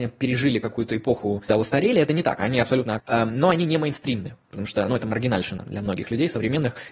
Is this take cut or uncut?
cut